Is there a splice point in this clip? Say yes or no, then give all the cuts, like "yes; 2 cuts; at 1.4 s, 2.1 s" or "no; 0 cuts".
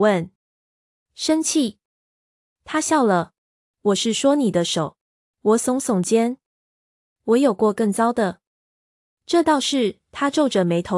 yes; 2 cuts; at 3.5 s, 5.2 s